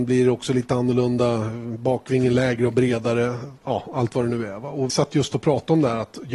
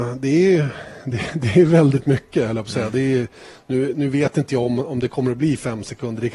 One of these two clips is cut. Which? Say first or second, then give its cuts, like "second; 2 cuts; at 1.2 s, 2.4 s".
first; 2 cuts; at 3.6 s, 4.9 s